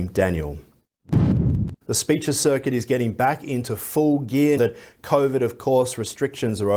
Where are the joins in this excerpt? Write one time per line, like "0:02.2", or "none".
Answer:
0:01.8
0:04.6